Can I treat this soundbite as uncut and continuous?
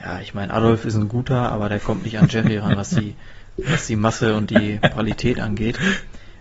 yes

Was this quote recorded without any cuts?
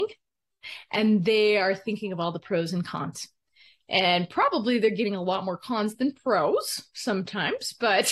yes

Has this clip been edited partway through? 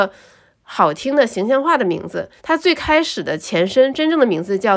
yes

